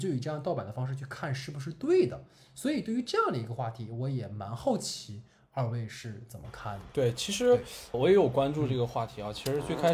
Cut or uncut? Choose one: cut